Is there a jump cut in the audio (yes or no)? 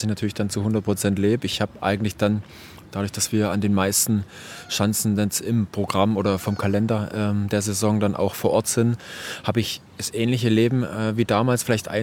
yes